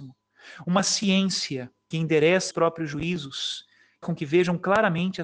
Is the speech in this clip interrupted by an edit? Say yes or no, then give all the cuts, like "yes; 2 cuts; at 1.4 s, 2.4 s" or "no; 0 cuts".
yes; 3 cuts; at 1.9 s, 2.5 s, 4.0 s